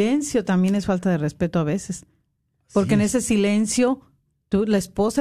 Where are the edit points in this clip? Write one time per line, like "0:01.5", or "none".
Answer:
none